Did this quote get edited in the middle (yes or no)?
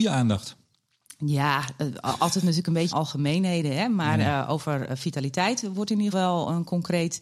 yes